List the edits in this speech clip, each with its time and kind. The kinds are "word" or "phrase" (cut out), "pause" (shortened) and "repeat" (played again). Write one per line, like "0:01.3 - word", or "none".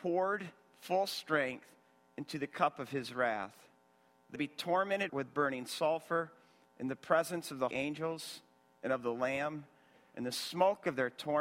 0:04.3 - word
0:05.1 - word
0:07.7 - word